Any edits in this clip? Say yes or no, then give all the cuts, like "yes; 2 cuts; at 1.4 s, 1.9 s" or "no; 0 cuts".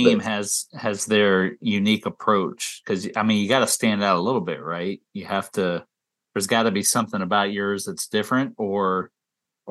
no; 0 cuts